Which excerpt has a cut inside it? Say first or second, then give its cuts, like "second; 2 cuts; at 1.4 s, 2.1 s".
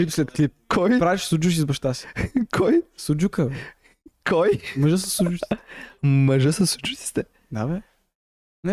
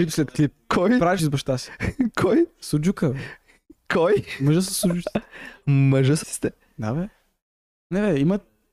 second; 2 cuts; at 1.2 s, 6.2 s